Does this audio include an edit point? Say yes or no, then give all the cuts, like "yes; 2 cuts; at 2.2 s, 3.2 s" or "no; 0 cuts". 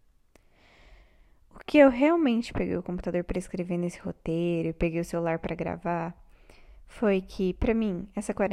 no; 0 cuts